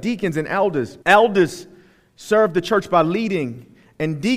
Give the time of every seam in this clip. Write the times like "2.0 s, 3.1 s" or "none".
1.0 s